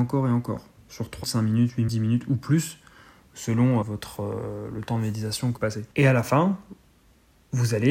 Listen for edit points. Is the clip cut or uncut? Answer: cut